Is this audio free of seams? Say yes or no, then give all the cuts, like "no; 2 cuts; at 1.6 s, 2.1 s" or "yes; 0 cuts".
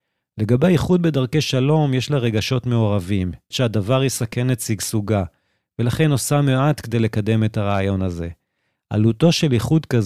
no; 1 cut; at 3.5 s